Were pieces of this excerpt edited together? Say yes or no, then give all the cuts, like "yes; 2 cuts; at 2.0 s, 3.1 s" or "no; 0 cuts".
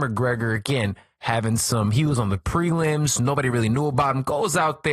no; 0 cuts